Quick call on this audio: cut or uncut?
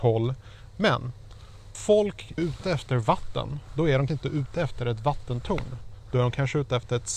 cut